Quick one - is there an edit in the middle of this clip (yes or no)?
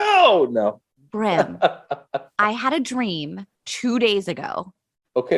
yes